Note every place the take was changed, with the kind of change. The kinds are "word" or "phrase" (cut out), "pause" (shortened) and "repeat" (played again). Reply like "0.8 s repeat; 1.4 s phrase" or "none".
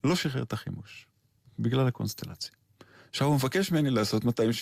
none